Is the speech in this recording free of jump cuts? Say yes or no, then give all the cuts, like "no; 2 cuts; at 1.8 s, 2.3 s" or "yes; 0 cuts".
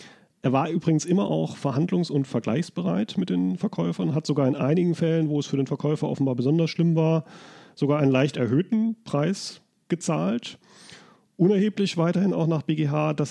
yes; 0 cuts